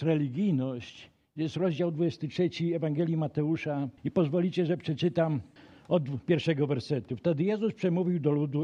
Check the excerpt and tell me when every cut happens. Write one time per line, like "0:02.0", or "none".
0:04.0
0:05.6